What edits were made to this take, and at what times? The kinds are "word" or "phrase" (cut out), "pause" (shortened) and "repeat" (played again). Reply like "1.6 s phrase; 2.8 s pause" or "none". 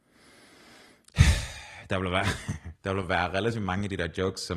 2.8 s pause